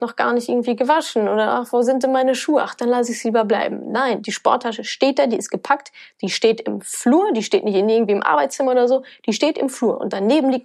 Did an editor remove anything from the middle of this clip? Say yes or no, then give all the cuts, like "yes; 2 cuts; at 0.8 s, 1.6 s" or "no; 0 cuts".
no; 0 cuts